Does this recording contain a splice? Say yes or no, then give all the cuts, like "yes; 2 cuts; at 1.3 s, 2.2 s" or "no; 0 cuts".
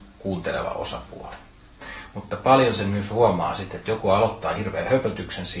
no; 0 cuts